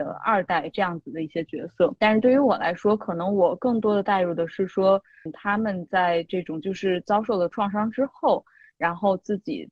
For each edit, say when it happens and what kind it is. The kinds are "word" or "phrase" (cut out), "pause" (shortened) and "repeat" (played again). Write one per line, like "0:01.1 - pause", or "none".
0:02.0 - pause
0:05.3 - word